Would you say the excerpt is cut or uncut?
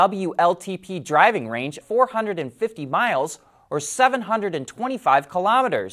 cut